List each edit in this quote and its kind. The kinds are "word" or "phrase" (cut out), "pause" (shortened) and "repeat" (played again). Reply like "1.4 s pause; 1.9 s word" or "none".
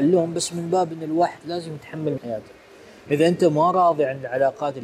2.2 s word

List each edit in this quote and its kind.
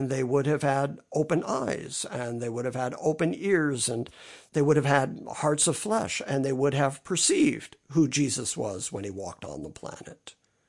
none

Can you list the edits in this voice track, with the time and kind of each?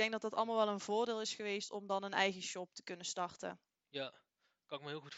none

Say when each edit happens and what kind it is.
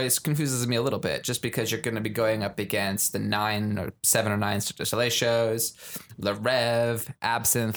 none

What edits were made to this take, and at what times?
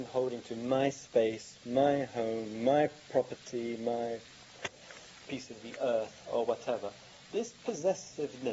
none

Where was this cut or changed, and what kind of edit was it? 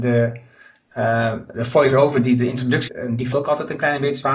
2.9 s word; 3.3 s word

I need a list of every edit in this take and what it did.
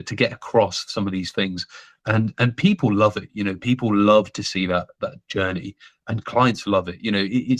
none

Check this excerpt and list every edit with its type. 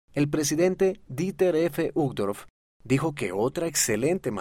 none

